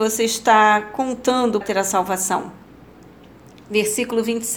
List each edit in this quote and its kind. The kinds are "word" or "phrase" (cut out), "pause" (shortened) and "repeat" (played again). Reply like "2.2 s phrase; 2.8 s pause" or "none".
1.6 s word

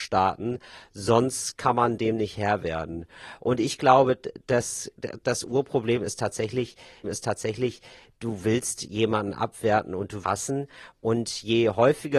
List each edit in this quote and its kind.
7.0 s repeat; 10.2 s word

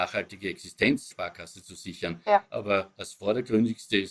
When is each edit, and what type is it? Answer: 1.1 s word

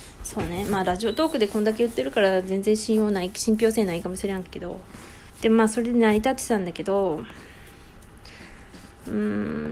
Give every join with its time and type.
5.3 s pause

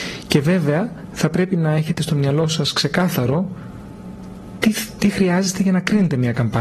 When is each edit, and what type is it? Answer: none

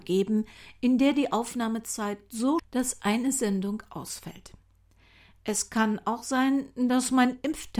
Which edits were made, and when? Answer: 2.6 s phrase

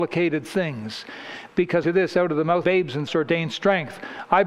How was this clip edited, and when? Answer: 1.8 s word; 2.6 s word; 3.1 s phrase

